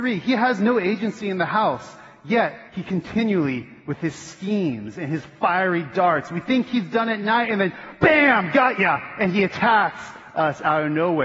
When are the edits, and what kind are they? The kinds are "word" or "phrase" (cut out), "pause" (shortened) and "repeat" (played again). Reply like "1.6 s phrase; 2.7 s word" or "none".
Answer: 2.7 s pause